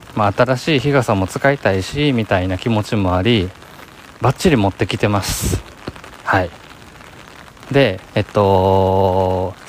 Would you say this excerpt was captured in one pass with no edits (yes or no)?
no